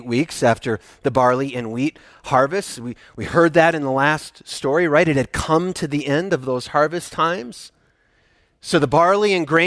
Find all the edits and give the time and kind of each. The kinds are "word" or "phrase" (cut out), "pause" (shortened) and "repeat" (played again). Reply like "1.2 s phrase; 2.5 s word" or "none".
none